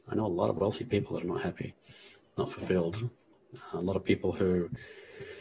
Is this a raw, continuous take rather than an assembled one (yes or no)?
yes